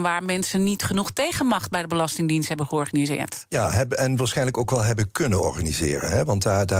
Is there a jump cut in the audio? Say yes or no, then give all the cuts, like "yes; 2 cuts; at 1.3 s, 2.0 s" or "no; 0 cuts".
no; 0 cuts